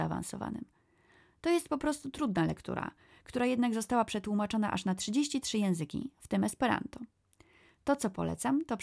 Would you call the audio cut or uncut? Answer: uncut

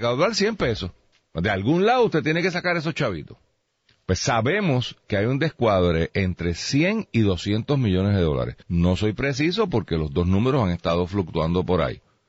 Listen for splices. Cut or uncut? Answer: cut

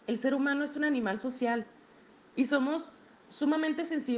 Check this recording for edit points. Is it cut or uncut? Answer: uncut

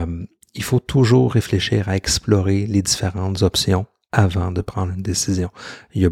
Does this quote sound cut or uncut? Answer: uncut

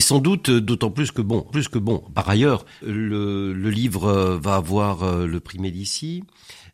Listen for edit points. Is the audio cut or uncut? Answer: cut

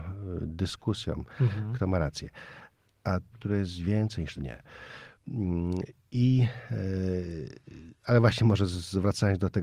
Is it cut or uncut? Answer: cut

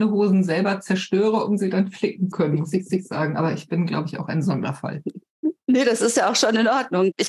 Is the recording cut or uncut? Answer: cut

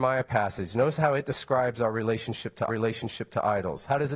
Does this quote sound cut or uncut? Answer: cut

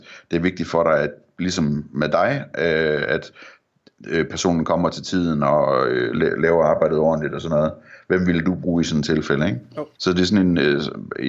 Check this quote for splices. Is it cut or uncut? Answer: cut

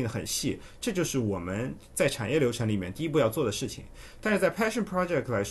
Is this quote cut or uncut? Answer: uncut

